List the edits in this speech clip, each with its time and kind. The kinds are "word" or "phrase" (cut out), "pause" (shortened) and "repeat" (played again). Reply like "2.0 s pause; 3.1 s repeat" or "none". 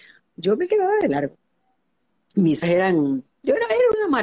2.6 s word; 3.3 s pause

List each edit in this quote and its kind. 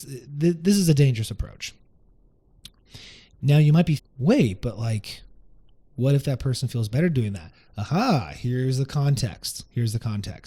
4.0 s word

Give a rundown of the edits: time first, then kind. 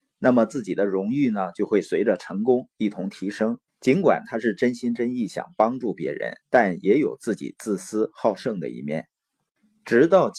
3.7 s pause; 6.4 s pause

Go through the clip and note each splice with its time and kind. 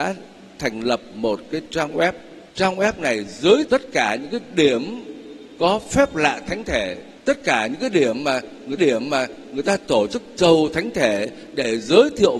2.5 s pause; 3.7 s word; 7.2 s pause; 8.8 s repeat

